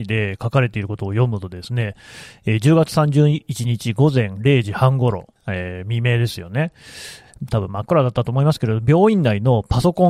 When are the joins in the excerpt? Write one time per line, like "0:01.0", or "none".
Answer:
0:05.4